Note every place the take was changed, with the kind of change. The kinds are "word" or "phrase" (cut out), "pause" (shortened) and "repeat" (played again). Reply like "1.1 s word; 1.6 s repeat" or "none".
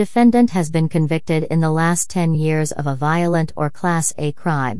none